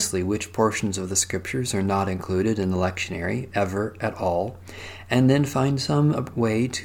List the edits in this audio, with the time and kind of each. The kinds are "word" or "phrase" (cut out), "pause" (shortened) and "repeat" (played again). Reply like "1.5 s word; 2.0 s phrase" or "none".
none

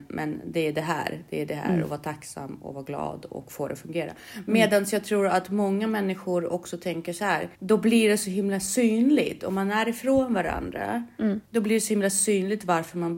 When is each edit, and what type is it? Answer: 7.5 s pause; 11.5 s pause

